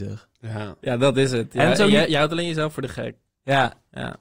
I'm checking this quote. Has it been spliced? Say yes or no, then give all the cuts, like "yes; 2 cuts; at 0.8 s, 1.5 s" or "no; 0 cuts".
no; 0 cuts